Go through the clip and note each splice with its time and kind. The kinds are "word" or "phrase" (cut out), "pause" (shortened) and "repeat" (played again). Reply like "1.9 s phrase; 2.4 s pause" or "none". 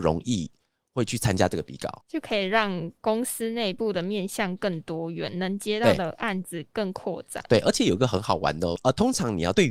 2.0 s pause